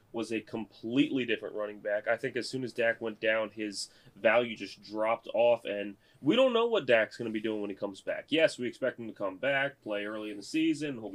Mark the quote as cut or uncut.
uncut